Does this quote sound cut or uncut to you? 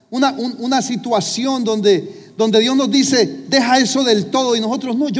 uncut